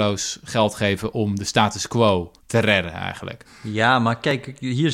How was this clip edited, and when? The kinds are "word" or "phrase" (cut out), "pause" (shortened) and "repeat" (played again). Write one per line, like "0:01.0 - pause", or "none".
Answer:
0:02.4 - pause